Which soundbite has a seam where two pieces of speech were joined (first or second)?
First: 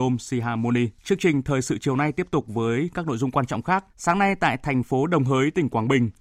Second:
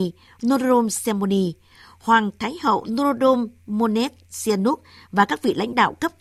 first